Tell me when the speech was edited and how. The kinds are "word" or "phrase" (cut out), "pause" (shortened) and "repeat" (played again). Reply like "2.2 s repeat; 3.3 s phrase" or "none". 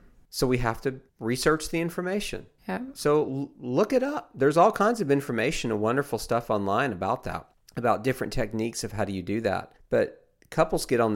1.1 s pause; 2.6 s pause; 7.5 s pause; 9.8 s pause